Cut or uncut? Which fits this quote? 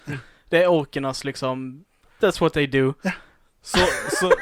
uncut